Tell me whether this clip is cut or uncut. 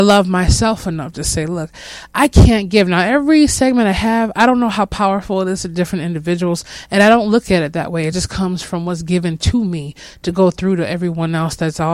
uncut